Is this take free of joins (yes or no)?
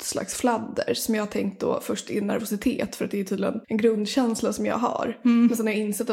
no